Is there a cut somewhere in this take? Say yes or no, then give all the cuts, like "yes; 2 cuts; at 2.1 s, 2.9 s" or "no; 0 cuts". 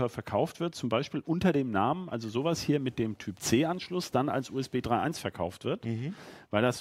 no; 0 cuts